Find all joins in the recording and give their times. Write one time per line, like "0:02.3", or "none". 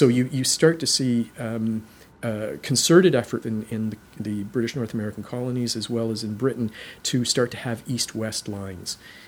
0:03.4